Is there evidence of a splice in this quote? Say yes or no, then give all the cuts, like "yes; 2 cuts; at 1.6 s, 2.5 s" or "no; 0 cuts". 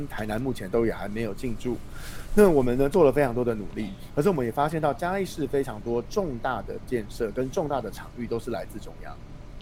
no; 0 cuts